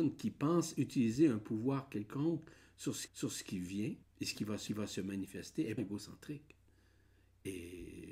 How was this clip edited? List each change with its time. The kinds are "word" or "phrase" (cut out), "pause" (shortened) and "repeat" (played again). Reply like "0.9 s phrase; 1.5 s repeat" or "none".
3.1 s repeat; 4.0 s pause; 4.7 s repeat; 5.8 s word